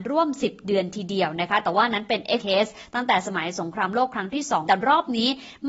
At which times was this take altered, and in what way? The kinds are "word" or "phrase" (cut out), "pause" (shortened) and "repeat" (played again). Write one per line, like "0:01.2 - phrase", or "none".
0:02.4 - word
0:04.7 - phrase